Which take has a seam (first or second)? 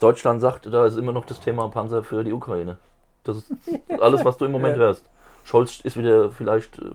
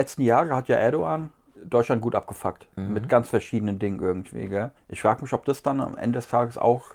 second